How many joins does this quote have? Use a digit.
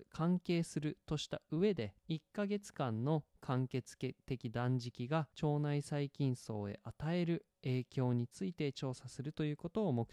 2